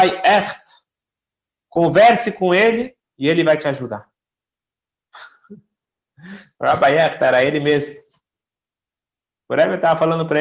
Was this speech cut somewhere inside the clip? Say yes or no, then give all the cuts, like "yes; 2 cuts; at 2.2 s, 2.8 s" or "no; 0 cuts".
no; 0 cuts